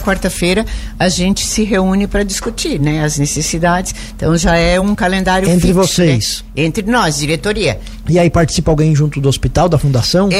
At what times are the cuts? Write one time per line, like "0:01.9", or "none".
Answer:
none